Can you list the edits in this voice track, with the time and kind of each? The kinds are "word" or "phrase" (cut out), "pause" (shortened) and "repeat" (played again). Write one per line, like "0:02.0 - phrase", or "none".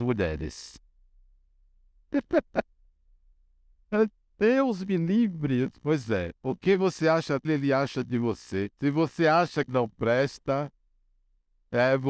0:06.4 - pause
0:07.4 - word
0:08.7 - pause
0:09.7 - word